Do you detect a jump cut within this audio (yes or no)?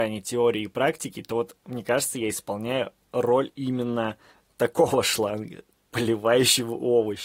no